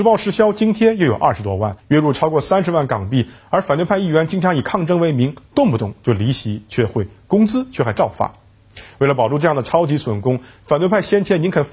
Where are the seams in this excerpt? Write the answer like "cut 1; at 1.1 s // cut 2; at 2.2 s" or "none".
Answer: cut 1; at 1.8 s